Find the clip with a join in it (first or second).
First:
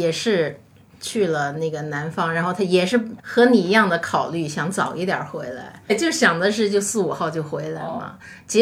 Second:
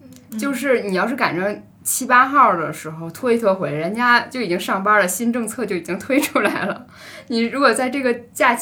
first